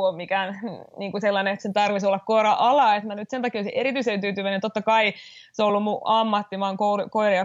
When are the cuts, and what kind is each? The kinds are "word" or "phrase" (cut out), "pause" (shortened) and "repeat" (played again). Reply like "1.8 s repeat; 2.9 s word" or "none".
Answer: none